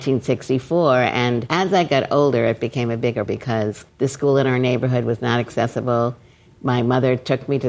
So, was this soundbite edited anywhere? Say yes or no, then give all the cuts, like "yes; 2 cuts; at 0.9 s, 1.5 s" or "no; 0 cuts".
yes; 2 cuts; at 3.3 s, 3.9 s